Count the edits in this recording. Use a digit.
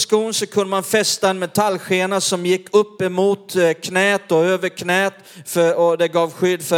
0